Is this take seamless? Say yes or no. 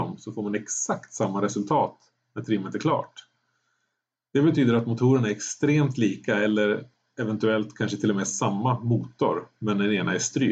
yes